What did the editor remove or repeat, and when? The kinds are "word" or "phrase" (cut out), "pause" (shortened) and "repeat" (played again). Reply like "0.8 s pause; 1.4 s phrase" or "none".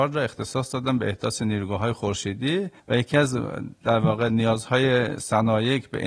2.8 s pause